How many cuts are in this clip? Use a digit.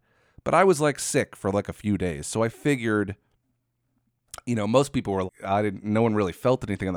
1